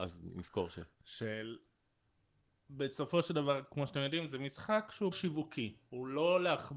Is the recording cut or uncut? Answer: cut